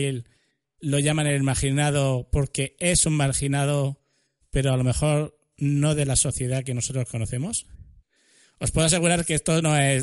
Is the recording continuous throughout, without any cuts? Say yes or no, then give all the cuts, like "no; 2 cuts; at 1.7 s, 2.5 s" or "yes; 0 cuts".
yes; 0 cuts